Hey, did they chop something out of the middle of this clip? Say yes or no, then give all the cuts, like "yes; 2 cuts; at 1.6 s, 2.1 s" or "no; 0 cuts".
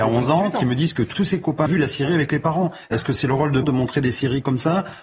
yes; 3 cuts; at 1.1 s, 1.7 s, 3.6 s